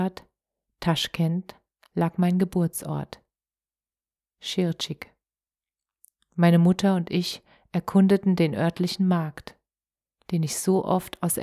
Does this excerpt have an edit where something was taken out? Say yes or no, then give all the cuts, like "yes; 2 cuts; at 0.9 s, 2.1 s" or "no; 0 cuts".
no; 0 cuts